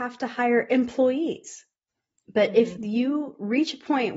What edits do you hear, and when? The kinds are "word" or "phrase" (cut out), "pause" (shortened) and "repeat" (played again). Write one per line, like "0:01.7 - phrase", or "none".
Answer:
none

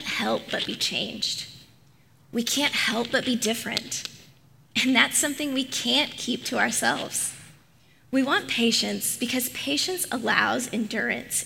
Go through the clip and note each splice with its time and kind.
none

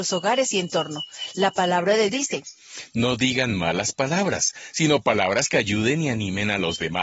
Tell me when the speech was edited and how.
0:02.1 - word

